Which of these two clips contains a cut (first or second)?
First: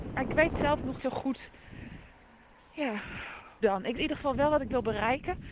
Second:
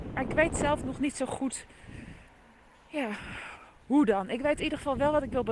first